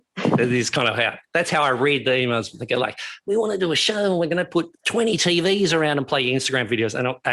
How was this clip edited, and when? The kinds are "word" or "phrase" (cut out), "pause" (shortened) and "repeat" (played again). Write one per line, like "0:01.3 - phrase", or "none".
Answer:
0:04.8 - pause